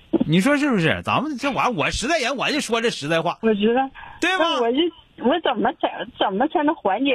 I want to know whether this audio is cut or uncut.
uncut